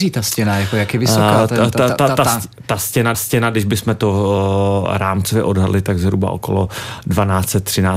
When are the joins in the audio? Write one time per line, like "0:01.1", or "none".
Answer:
0:03.1